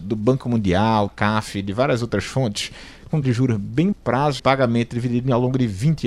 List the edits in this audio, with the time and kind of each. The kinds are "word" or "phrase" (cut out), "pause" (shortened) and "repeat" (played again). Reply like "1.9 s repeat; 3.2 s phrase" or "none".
1.1 s word; 3.2 s word; 3.9 s word; 4.4 s phrase